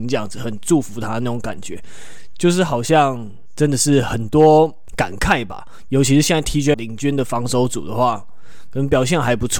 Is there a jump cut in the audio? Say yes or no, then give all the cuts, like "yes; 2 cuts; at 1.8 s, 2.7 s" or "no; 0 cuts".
yes; 1 cut; at 6.7 s